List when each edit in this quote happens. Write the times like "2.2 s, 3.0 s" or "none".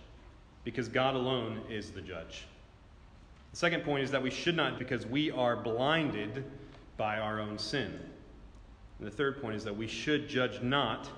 4.8 s